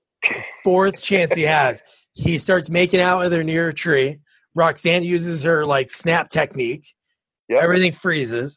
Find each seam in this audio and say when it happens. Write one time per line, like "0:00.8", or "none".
none

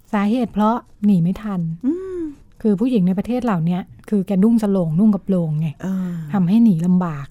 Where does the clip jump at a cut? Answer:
0:00.9
0:02.5
0:04.0

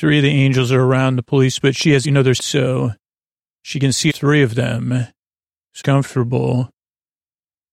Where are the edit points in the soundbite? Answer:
0:01.6
0:02.0
0:02.4
0:03.2
0:04.1
0:05.8

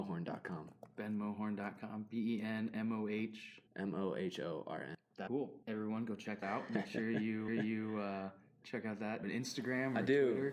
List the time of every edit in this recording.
0:03.7
0:05.3
0:05.6
0:06.4
0:07.5
0:09.2

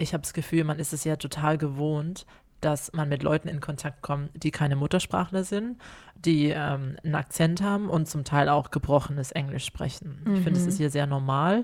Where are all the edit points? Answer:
none

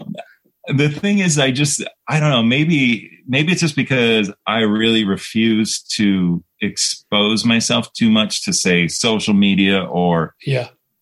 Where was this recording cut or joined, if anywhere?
0:02.0
0:04.4

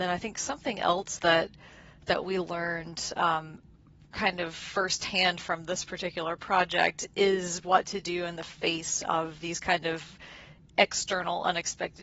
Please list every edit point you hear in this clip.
none

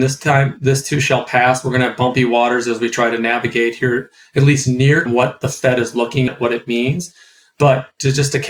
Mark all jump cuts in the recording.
0:05.1
0:06.3

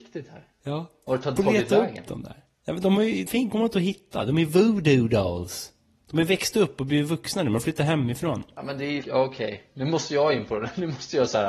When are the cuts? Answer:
0:01.4
0:03.3
0:09.0

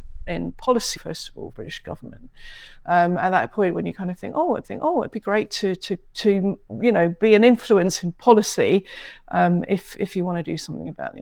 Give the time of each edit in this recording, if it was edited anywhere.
0:01.0
0:01.5
0:04.6

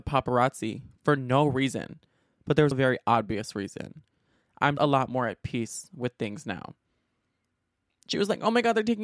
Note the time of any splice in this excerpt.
0:02.7
0:04.8

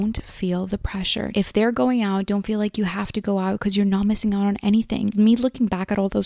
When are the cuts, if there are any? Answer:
none

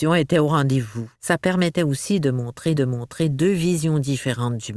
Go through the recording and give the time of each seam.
0:01.2
0:02.8

